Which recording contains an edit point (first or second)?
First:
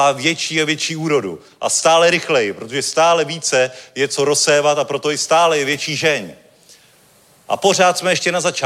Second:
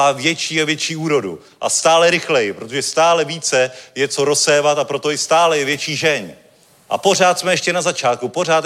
second